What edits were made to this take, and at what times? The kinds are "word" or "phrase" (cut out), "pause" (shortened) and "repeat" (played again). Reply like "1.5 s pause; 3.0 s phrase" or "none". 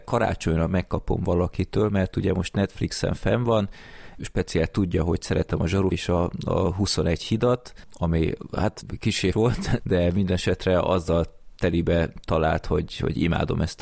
4.2 s word; 5.9 s phrase; 9.3 s word; 9.8 s word